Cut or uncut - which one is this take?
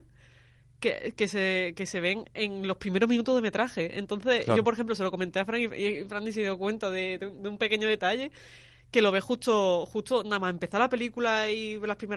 uncut